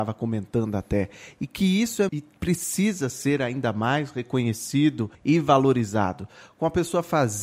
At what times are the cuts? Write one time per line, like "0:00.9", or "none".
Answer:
0:02.1
0:05.1

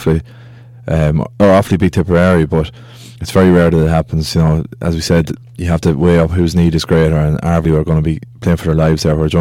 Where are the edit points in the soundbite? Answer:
0:03.2
0:05.4
0:07.6

